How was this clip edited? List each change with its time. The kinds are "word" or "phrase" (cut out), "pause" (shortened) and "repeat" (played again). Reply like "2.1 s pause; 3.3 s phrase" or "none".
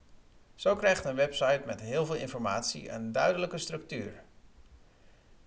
none